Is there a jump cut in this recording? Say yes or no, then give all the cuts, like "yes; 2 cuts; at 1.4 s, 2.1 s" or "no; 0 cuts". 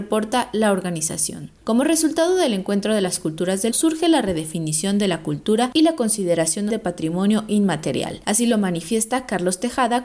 yes; 2 cuts; at 3.7 s, 6.7 s